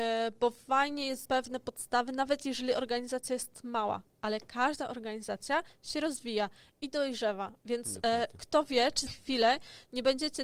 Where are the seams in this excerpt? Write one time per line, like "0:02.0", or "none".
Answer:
0:01.2
0:09.1